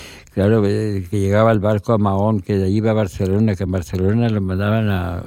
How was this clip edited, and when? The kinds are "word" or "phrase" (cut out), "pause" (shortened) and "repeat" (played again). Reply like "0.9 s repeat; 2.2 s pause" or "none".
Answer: none